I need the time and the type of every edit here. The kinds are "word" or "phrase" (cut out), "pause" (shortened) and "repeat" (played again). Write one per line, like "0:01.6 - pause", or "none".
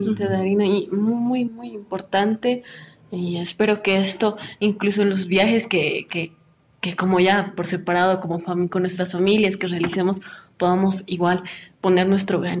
0:01.5 - word